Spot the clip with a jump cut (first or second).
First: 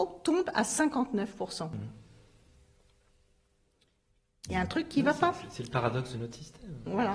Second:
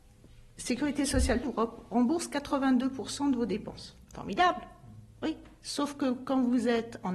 second